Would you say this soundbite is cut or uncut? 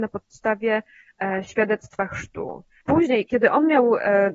uncut